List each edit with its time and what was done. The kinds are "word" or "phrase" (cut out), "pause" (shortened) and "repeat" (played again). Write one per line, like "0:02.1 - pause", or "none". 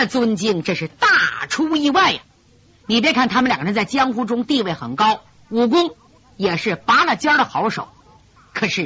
none